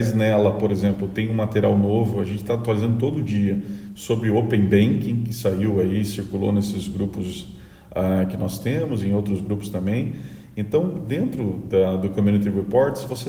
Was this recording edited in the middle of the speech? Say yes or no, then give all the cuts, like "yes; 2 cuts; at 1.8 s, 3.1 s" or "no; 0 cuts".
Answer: no; 0 cuts